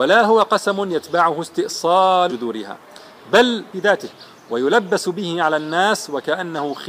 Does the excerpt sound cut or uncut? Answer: cut